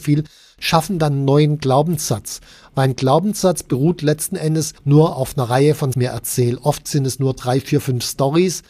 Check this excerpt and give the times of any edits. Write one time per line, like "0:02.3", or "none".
0:04.8
0:05.9